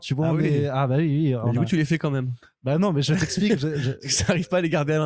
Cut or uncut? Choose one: uncut